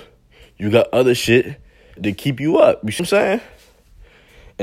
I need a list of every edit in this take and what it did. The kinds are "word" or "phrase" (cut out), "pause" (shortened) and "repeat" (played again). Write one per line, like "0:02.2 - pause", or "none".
0:02.0 - word
0:03.0 - word